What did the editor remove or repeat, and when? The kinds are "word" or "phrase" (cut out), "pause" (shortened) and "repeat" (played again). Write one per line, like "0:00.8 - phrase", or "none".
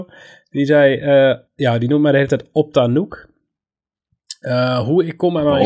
0:01.5 - pause